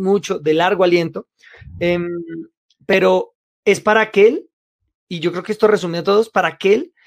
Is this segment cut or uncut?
uncut